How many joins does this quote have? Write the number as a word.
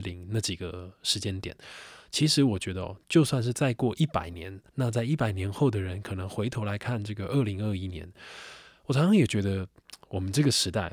one